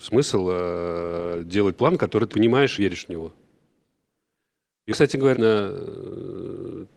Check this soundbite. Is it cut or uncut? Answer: cut